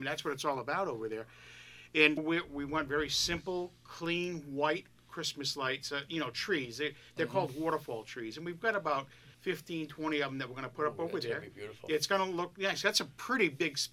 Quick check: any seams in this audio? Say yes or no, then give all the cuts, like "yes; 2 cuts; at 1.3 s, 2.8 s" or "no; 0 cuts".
yes; 2 cuts; at 2.2 s, 9.3 s